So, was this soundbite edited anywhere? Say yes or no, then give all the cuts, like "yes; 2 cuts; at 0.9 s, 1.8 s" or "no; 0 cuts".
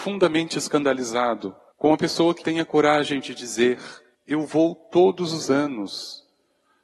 yes; 3 cuts; at 1.7 s, 2.4 s, 4.1 s